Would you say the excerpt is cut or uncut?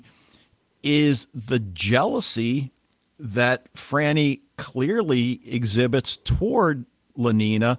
uncut